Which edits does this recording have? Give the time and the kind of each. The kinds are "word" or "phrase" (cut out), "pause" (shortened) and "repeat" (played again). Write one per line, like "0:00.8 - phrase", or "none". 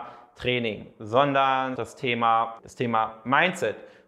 0:01.8 - phrase
0:02.6 - word